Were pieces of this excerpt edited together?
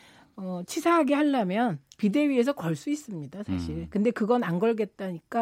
no; 0 cuts

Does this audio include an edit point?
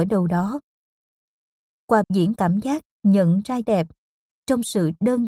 yes; 3 cuts; at 2.0 s, 2.4 s, 3.6 s

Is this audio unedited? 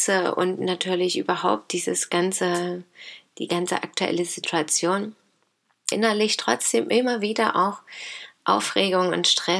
no; 1 cut; at 5.9 s

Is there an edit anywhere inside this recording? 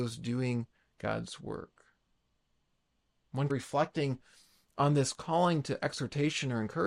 yes; 1 cut; at 3.5 s

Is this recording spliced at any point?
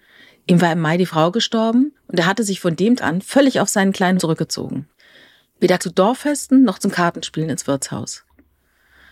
yes; 4 cuts; at 1.9 s, 3.0 s, 4.2 s, 5.8 s

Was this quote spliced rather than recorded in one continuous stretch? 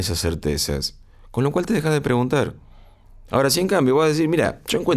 no; 0 cuts

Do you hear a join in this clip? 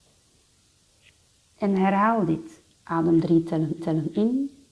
yes; 2 cuts; at 2.7 s, 3.8 s

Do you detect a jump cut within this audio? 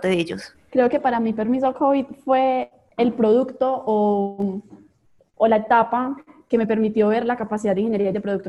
no; 0 cuts

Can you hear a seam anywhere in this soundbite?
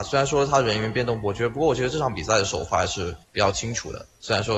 yes; 1 cut; at 3.2 s

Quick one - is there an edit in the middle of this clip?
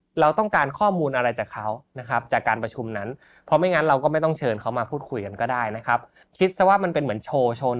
no; 0 cuts

